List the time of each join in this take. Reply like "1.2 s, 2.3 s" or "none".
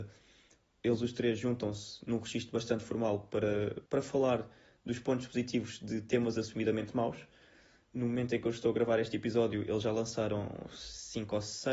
3.9 s

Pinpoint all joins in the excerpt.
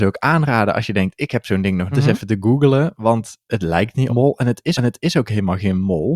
1.9 s, 4.1 s, 4.8 s

